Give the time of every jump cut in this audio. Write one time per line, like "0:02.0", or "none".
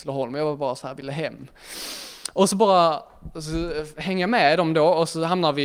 none